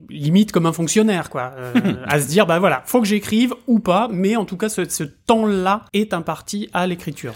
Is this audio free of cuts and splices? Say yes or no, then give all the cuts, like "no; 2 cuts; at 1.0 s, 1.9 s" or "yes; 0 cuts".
no; 1 cut; at 5.9 s